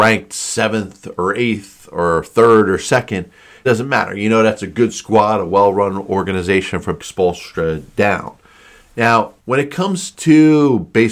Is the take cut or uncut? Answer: cut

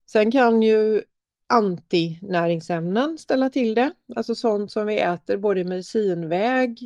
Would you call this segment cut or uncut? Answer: uncut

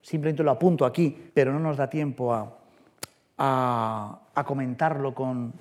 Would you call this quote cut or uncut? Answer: cut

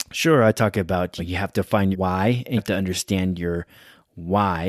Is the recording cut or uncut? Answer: cut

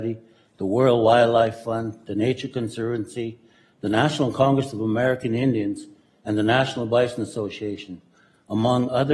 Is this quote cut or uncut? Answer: uncut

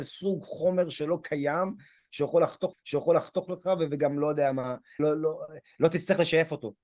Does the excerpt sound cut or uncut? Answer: cut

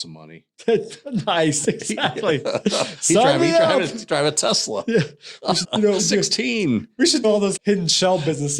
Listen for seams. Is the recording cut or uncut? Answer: cut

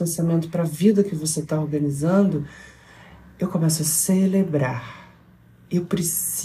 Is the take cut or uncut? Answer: uncut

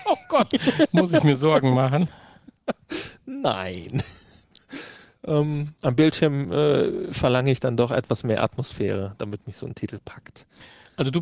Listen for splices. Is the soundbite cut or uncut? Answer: uncut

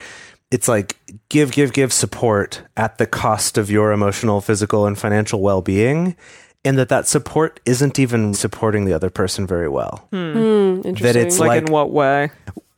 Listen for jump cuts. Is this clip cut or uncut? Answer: cut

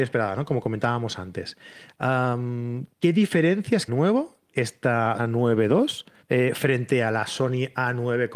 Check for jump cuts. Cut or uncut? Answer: cut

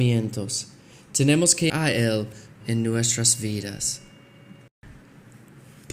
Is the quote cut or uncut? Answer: cut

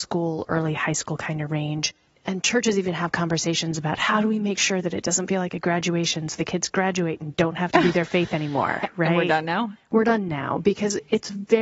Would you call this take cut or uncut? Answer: uncut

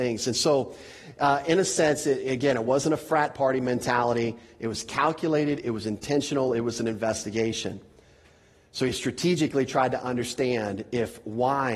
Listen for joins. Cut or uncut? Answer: uncut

